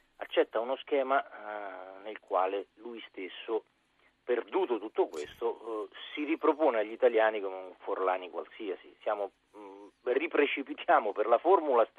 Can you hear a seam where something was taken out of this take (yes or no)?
no